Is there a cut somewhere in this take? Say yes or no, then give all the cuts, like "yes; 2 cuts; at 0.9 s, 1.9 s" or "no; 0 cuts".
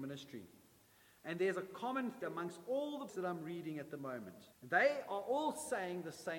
yes; 3 cuts; at 2.2 s, 3.1 s, 4.5 s